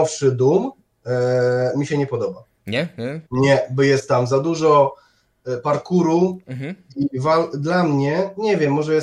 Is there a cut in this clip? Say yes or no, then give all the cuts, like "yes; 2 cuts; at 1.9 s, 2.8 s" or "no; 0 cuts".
yes; 1 cut; at 3.3 s